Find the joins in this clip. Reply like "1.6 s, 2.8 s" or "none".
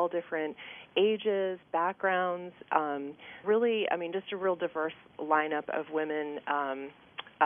3.4 s

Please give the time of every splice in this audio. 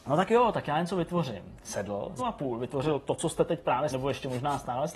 2.2 s, 3.9 s

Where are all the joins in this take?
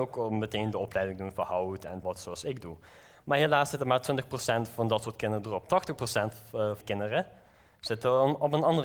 2.0 s, 6.8 s

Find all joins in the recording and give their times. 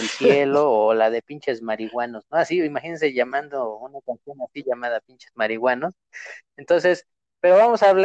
none

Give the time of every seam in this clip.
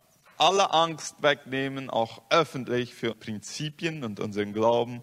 3.1 s

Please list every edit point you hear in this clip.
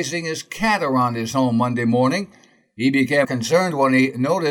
3.2 s

